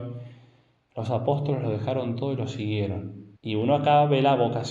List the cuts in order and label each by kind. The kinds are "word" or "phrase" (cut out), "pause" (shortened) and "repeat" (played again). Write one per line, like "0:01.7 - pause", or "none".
0:03.4 - pause

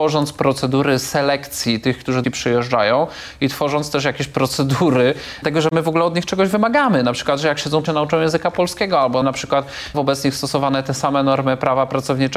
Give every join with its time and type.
0:02.2 - phrase
0:05.4 - word
0:07.9 - phrase
0:09.2 - word
0:09.9 - word

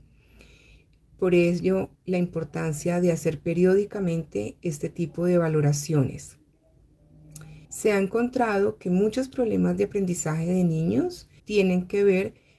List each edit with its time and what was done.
0:02.0 - pause
0:07.6 - pause
0:11.4 - pause

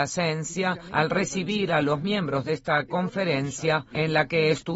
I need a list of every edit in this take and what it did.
none

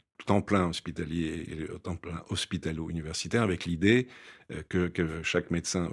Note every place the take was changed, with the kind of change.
none

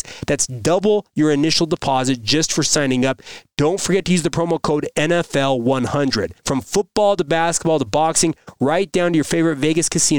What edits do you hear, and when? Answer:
0:06.4 - pause

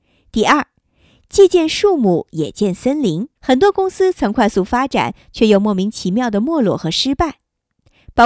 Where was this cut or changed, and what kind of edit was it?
0:03.4 - pause

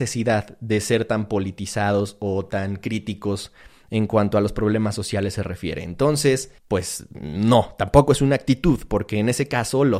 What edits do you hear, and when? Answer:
0:06.6 - pause

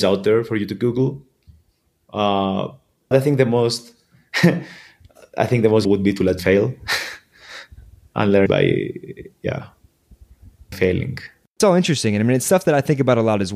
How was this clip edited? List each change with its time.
0:03.1 - word
0:05.9 - word
0:06.4 - word
0:08.5 - word
0:10.7 - word

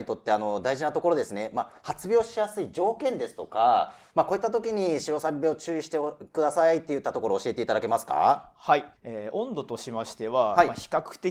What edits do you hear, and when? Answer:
0:09.0 - pause

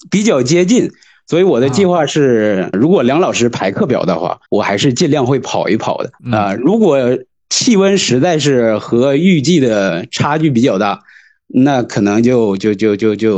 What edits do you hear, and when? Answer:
0:02.7 - word
0:04.5 - pause
0:06.2 - pause

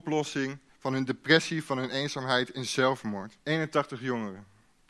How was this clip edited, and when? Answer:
0:03.4 - pause

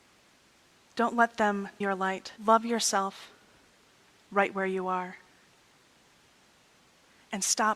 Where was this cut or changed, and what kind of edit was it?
0:01.8 - word
0:02.4 - pause

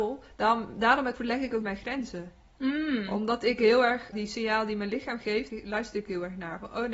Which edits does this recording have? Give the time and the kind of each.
0:01.1 - word
0:01.6 - word
0:04.1 - word
0:05.5 - word

